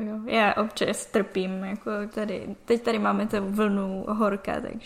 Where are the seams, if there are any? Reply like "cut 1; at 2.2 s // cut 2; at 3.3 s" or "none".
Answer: cut 1; at 2.1 s